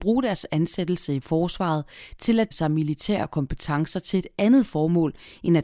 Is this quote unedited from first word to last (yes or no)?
no